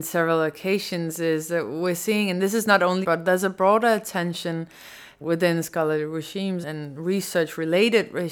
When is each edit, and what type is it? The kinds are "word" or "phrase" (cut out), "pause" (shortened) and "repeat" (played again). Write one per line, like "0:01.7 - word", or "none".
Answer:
0:03.0 - word
0:05.2 - word
0:06.6 - word

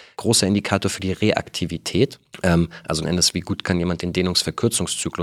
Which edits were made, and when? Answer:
0:03.0 - word

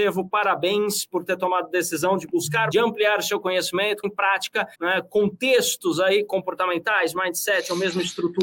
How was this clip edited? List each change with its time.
0:02.7 - phrase
0:04.0 - word
0:04.7 - pause

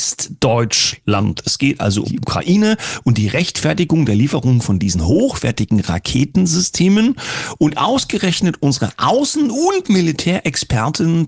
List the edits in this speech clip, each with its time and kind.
0:02.0 - word

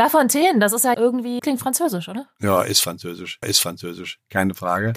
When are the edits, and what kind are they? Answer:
0:00.9 - word
0:01.4 - word
0:03.4 - repeat

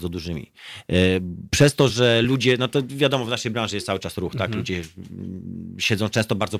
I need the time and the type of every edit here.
none

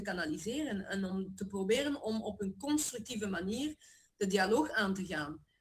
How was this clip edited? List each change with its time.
none

